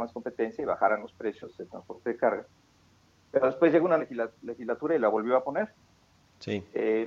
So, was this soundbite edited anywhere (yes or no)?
yes